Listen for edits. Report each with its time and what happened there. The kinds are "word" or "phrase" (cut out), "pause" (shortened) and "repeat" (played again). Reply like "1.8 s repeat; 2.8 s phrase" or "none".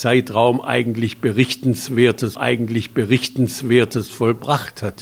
2.3 s repeat